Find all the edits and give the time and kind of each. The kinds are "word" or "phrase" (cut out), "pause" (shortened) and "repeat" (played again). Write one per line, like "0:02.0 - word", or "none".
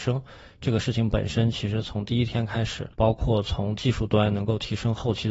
0:02.9 - pause